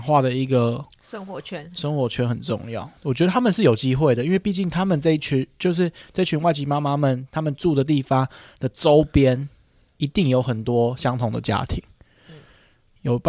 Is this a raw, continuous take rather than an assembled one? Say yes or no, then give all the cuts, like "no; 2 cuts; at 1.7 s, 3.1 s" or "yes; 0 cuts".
no; 1 cut; at 3.0 s